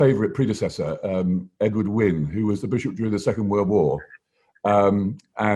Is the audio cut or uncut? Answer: uncut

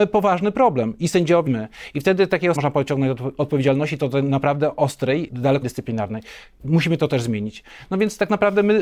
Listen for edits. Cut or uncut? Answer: cut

